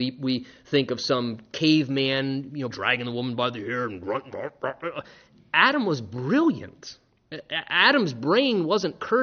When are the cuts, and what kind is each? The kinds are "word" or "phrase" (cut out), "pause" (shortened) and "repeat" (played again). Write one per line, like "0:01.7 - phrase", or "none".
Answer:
0:02.7 - word